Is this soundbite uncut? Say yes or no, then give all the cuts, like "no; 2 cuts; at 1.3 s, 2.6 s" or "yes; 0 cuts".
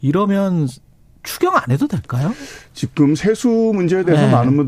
yes; 0 cuts